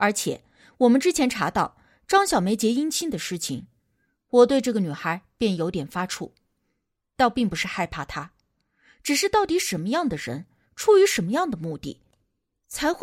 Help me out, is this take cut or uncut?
uncut